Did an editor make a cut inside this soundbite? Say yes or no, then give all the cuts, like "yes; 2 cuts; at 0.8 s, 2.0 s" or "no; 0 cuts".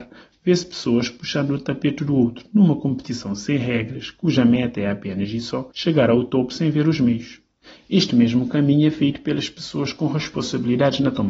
yes; 2 cuts; at 5.7 s, 7.6 s